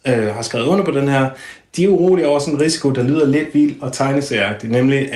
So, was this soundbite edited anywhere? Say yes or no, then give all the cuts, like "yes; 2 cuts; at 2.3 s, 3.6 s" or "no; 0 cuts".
no; 0 cuts